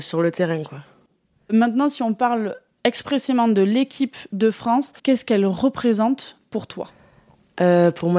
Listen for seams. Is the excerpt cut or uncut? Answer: cut